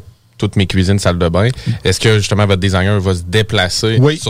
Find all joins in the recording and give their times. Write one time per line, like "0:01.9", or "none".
none